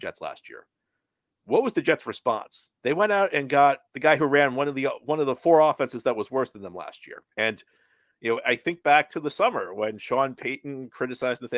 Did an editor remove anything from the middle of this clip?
yes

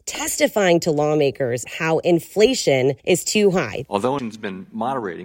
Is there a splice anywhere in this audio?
yes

